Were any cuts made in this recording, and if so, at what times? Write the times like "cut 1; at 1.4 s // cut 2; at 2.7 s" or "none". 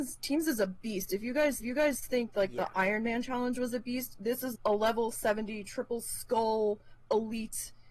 cut 1; at 1.6 s // cut 2; at 4.5 s